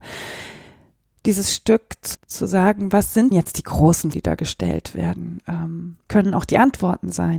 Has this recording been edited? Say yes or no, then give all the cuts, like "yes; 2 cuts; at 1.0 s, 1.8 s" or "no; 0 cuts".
yes; 4 cuts; at 2.1 s, 3.3 s, 4.1 s, 6.1 s